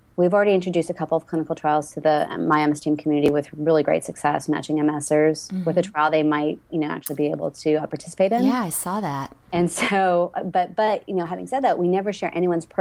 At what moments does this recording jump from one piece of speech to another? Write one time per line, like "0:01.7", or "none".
0:09.4